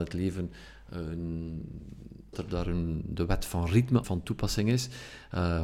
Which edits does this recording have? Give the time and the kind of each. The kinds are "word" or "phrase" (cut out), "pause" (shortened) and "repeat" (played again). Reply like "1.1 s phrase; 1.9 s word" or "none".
2.3 s phrase; 4.0 s word